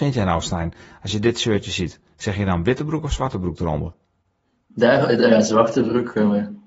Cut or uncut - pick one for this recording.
uncut